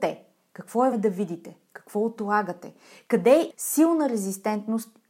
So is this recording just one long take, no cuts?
no; 2 cuts; at 0.9 s, 3.5 s

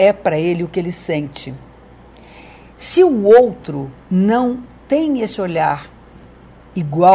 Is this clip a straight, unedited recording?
yes; 0 cuts

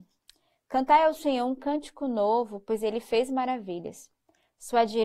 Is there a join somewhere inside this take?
no; 0 cuts

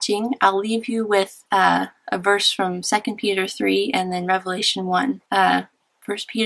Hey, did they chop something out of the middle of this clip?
yes; 2 cuts; at 1.5 s, 5.3 s

